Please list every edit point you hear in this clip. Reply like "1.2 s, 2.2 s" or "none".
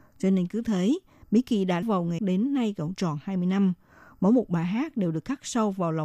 1.8 s, 2.2 s